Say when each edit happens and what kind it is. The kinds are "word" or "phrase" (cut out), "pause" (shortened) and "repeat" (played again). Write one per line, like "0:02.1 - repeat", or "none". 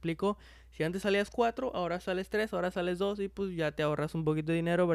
none

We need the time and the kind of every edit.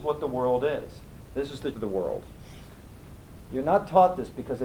0:01.7 - word

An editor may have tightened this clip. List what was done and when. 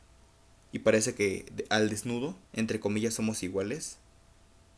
0:02.4 - pause

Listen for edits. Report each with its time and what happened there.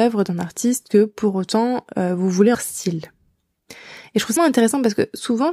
0:02.5 - phrase
0:04.4 - word

